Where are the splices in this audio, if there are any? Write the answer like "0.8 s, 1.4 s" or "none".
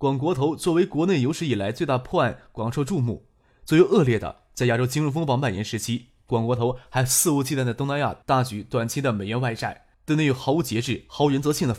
9.9 s